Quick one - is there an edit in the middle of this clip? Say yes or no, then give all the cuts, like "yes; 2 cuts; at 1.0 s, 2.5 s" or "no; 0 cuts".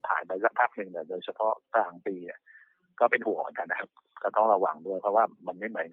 no; 0 cuts